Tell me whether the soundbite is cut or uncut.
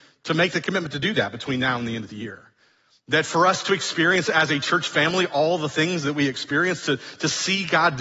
uncut